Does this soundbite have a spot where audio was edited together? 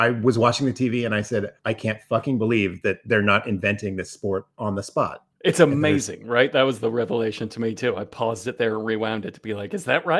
yes; 2 cuts; at 1.6 s, 5.3 s

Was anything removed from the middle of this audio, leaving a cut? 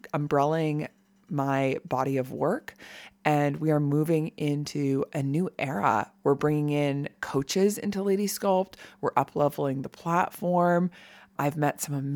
no; 0 cuts

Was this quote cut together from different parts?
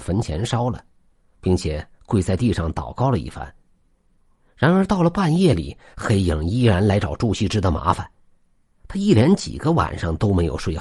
no; 0 cuts

